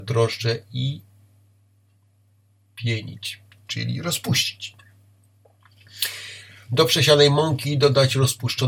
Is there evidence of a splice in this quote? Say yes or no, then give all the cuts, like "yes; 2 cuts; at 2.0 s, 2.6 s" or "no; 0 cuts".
no; 0 cuts